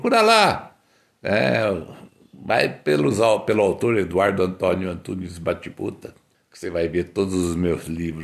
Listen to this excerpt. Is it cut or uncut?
cut